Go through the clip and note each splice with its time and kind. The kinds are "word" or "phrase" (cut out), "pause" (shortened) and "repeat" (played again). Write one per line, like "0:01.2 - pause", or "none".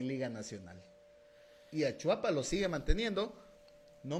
none